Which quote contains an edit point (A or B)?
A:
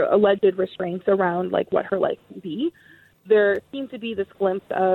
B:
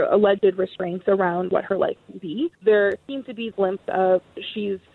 B